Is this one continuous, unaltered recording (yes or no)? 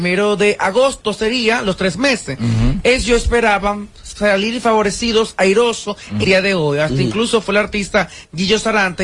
no